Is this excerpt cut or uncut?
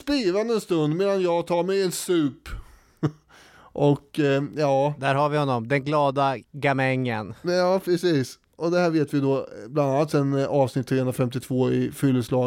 uncut